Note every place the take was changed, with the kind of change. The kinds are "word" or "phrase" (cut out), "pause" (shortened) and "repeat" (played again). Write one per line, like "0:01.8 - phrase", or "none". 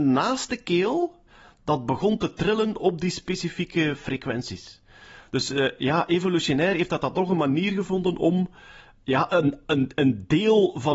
none